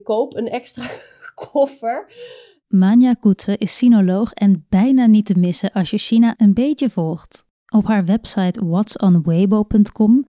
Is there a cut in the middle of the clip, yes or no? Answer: no